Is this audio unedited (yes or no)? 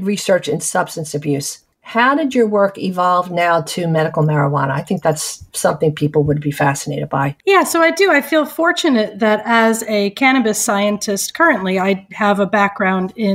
no